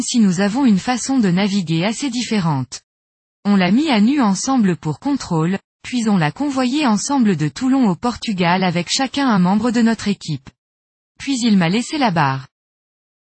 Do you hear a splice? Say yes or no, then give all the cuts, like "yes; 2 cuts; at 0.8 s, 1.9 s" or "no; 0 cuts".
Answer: no; 0 cuts